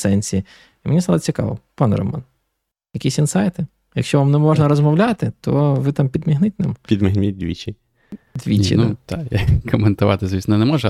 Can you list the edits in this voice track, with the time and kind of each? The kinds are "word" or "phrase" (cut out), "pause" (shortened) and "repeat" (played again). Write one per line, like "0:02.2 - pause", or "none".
none